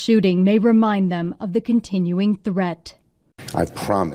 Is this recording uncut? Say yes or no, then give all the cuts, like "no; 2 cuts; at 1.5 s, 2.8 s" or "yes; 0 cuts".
yes; 0 cuts